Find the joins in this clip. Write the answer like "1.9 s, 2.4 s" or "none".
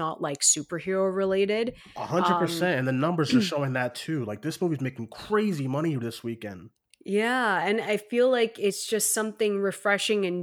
none